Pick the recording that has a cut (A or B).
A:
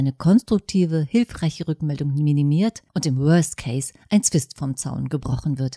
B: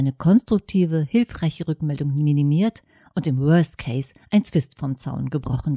A